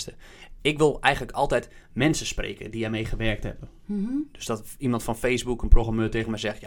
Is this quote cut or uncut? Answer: uncut